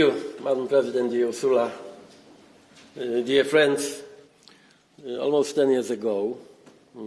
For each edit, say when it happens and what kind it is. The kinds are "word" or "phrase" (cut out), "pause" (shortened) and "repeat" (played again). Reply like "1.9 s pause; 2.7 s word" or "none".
none

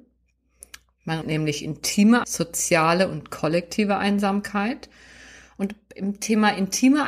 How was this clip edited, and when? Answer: 1.2 s word; 2.2 s word

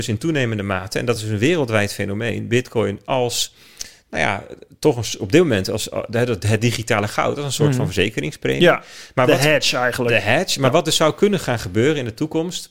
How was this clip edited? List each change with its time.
none

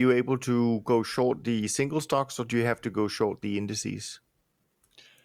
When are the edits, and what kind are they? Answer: none

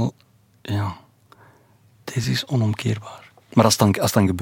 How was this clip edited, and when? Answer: none

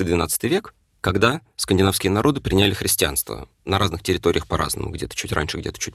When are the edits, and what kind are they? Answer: 3.5 s pause

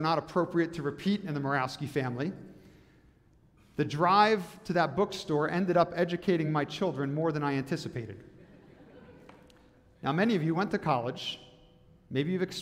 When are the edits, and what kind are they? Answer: none

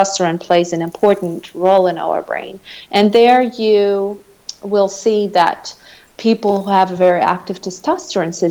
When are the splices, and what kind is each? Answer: none

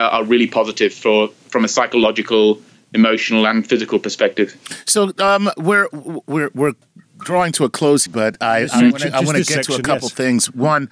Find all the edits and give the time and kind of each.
8.1 s word

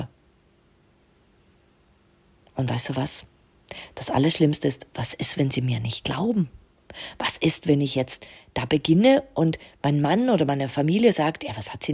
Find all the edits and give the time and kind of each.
none

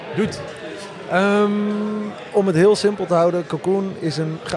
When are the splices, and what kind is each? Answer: none

